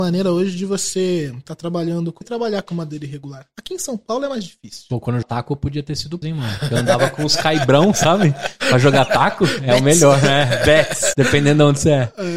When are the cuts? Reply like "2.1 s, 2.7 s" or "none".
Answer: 2.2 s, 5.2 s, 6.2 s, 11.1 s